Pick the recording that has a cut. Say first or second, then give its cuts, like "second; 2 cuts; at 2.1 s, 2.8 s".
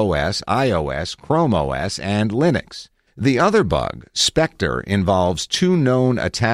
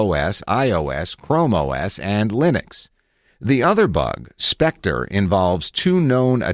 first; 1 cut; at 3.1 s